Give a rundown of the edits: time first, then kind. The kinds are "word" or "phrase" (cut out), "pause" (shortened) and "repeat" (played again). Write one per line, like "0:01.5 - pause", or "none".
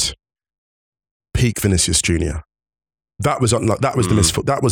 none